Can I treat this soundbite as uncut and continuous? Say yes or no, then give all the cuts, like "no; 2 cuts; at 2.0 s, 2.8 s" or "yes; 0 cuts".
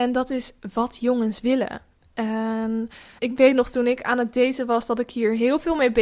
no; 1 cut; at 3.2 s